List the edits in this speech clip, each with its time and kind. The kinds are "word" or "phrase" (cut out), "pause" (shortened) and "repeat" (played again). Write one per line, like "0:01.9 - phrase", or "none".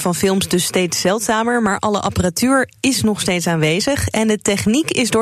none